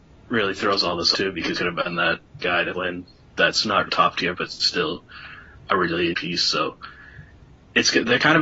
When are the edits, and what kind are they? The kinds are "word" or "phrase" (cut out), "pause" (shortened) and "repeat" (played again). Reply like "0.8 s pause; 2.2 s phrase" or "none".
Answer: 1.1 s word; 1.5 s word; 2.4 s word; 2.7 s word; 3.9 s word; 4.4 s word; 6.1 s word